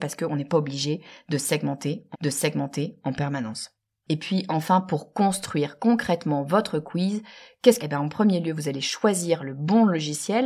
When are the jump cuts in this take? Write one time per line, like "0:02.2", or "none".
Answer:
0:02.1
0:07.8